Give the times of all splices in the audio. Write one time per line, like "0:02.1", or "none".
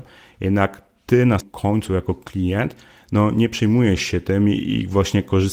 0:01.4